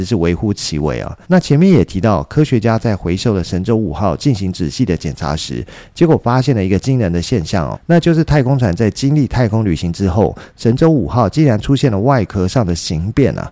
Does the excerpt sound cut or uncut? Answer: cut